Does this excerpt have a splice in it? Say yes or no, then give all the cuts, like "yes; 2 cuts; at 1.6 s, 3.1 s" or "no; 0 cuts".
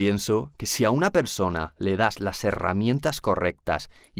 no; 0 cuts